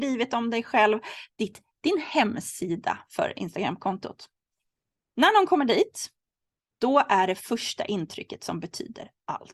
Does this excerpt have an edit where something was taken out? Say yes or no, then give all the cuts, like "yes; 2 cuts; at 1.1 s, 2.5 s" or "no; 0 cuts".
no; 0 cuts